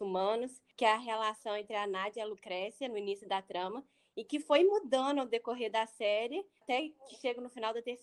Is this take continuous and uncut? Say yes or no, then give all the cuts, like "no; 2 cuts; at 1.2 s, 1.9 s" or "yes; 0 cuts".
yes; 0 cuts